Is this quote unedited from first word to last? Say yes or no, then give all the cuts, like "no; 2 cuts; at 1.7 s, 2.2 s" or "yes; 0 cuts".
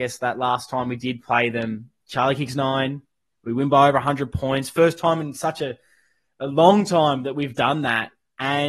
yes; 0 cuts